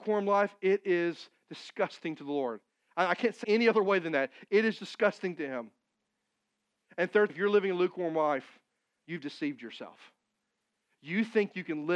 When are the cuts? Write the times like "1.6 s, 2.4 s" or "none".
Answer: 3.4 s, 4.8 s, 7.3 s